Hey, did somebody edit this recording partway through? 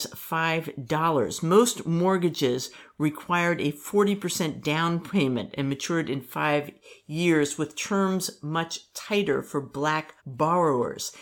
yes; 1 cut; at 10.2 s

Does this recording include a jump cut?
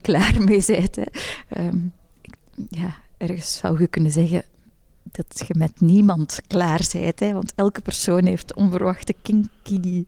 no; 0 cuts

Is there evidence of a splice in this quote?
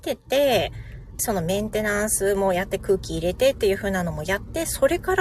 yes; 1 cut; at 1.2 s

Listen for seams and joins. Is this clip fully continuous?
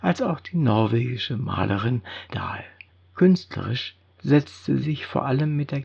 no; 3 cuts; at 2.3 s, 2.9 s, 4.8 s

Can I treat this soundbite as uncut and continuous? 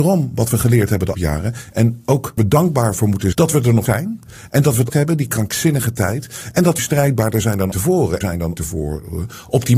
no; 9 cuts; at 1.1 s, 2.4 s, 3.3 s, 3.9 s, 4.9 s, 6.8 s, 7.7 s, 8.2 s, 8.6 s

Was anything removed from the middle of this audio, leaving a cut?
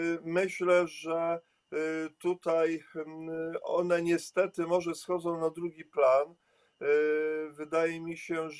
no; 0 cuts

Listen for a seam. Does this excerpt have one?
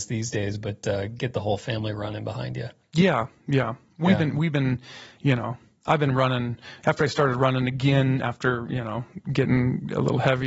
no; 0 cuts

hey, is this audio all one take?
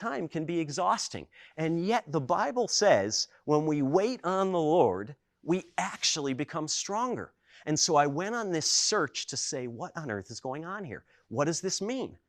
yes; 0 cuts

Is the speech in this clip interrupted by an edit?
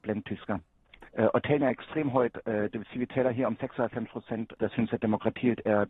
yes; 1 cut; at 1.1 s

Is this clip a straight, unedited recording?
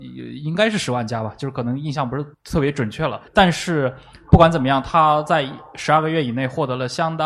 no; 2 cuts; at 2.3 s, 3.3 s

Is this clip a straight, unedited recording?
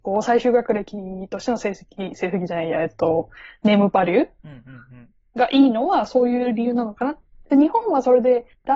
yes; 0 cuts

